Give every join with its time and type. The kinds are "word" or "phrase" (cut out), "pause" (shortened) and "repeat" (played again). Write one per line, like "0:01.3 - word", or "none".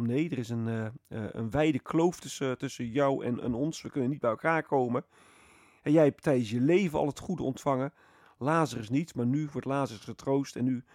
none